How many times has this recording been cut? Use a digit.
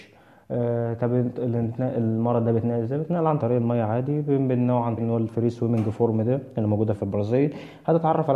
3